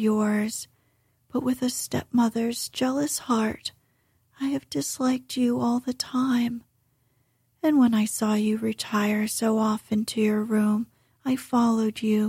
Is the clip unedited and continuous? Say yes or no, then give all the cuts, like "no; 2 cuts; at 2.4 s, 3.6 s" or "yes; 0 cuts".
yes; 0 cuts